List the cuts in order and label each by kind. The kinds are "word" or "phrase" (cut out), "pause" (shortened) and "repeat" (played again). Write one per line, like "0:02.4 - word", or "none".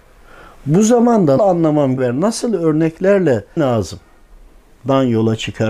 0:01.4 - word
0:02.0 - word
0:03.6 - word